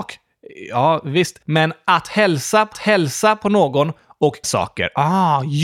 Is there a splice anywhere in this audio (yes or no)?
yes